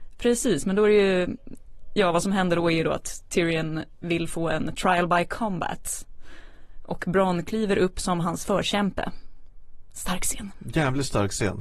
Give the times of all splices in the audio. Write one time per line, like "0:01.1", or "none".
none